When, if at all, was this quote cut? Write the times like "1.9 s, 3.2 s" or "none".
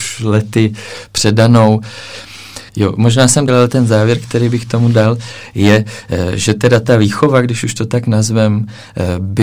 2.7 s, 3.5 s